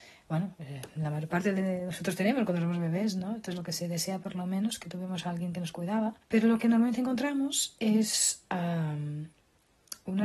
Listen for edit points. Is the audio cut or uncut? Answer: cut